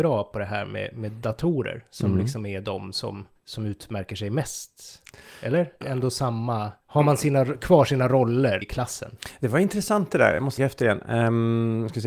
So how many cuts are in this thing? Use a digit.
5